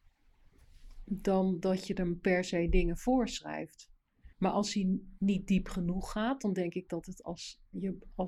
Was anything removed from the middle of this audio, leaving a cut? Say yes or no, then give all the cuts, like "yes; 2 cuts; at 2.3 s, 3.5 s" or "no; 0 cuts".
yes; 1 cut; at 4.3 s